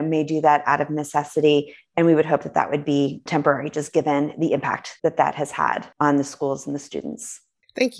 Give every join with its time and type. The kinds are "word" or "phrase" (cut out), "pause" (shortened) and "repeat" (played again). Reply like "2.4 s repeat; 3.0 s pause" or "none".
none